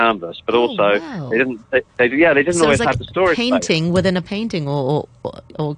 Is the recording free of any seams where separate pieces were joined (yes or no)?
no